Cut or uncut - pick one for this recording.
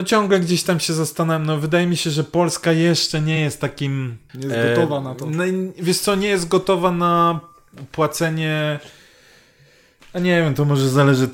uncut